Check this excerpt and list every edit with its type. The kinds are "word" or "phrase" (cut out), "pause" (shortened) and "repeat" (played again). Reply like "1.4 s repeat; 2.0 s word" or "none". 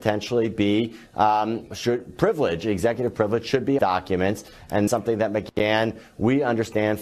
1.7 s word; 3.8 s phrase; 4.9 s phrase